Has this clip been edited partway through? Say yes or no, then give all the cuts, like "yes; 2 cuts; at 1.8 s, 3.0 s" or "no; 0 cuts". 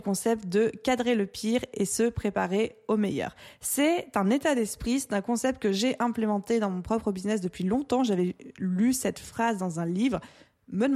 no; 0 cuts